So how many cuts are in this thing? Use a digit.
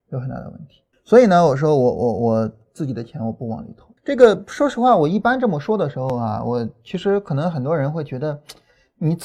2